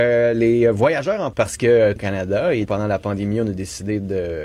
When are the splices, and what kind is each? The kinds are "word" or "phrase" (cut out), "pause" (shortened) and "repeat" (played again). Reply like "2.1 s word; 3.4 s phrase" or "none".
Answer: 1.3 s word; 2.0 s phrase; 2.6 s word